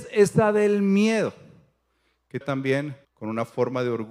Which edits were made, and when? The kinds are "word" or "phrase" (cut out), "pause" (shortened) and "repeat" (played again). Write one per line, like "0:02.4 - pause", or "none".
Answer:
0:02.4 - phrase
0:03.0 - pause